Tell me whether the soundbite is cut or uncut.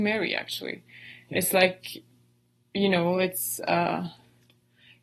uncut